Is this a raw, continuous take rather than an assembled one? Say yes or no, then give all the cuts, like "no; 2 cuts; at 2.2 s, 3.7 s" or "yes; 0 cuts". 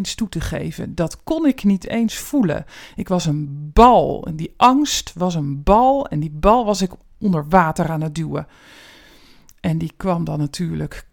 yes; 0 cuts